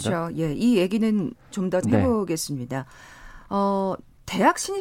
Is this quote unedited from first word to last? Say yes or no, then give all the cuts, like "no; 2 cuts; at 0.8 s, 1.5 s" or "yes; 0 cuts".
no; 2 cuts; at 1.5 s, 1.8 s